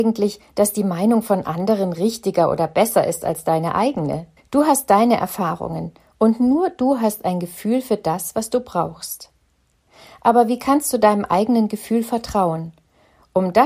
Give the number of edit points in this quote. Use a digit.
1